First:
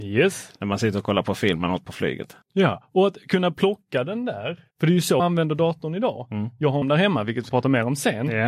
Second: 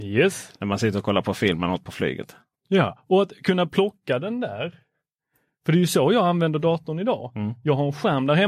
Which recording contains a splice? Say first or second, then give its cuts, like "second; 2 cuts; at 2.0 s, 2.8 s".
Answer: first; 5 cuts; at 2.4 s, 4.7 s, 5.2 s, 6.8 s, 7.5 s